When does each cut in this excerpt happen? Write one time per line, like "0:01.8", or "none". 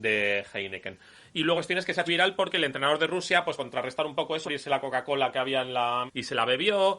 0:01.5
0:02.1
0:03.6
0:04.4
0:06.1